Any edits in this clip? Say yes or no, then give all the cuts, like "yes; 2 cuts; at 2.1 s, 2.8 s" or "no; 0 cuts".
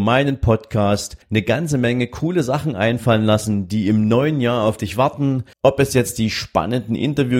yes; 2 cuts; at 1.2 s, 5.5 s